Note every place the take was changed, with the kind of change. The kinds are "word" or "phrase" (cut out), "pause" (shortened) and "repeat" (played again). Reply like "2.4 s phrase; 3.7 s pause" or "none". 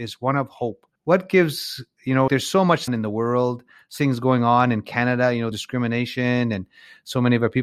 1.0 s pause; 2.3 s word; 2.9 s phrase; 4.0 s word; 5.5 s phrase